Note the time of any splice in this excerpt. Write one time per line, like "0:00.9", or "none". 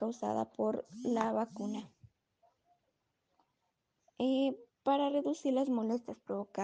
none